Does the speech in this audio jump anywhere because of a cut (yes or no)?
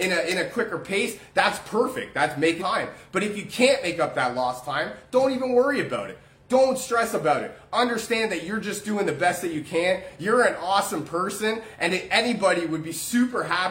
yes